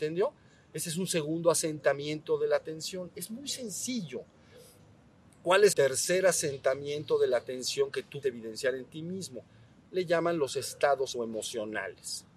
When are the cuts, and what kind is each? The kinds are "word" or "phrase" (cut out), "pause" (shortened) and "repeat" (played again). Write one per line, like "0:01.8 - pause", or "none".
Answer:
0:05.7 - word
0:08.2 - word
0:11.1 - word